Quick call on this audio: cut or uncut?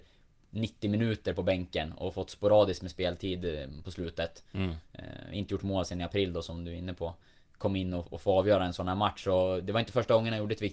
uncut